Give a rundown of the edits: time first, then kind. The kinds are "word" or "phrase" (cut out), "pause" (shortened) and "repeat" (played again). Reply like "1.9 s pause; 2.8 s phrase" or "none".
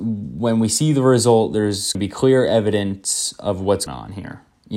1.9 s word; 3.9 s word